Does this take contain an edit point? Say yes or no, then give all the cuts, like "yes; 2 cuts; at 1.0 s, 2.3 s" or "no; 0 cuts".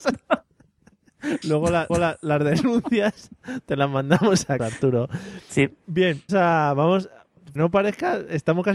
yes; 5 cuts; at 1.4 s, 1.9 s, 4.6 s, 6.3 s, 7.6 s